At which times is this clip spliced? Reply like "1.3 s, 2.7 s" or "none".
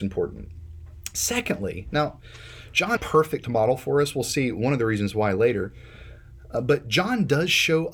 3.0 s